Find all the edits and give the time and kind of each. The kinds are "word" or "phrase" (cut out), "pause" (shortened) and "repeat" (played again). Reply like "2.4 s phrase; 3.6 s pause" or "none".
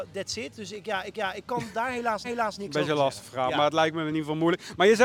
1.1 s repeat; 2.2 s repeat